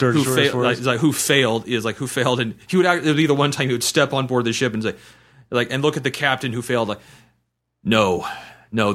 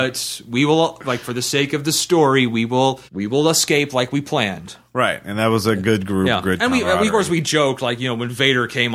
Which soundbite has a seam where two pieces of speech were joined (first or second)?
second